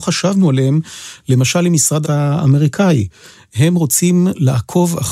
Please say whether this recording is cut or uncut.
cut